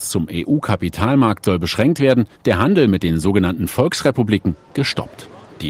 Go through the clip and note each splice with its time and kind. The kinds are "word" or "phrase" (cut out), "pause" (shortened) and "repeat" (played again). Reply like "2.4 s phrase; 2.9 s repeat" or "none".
2.3 s pause